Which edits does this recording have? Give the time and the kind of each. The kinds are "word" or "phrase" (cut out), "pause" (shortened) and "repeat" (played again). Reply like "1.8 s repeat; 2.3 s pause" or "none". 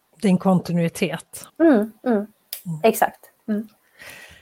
1.5 s pause